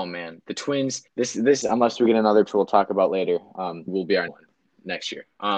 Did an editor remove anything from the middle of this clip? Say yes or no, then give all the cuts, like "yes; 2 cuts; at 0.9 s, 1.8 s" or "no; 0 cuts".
yes; 5 cuts; at 1.1 s, 1.6 s, 2.5 s, 3.9 s, 4.3 s